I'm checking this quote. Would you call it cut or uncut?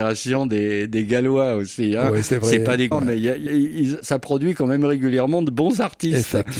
cut